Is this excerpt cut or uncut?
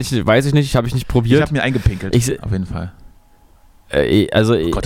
uncut